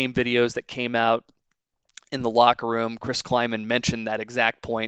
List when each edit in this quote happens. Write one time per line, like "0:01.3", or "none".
none